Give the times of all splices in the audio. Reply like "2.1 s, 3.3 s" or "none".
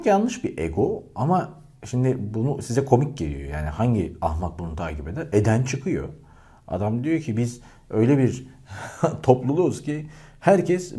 none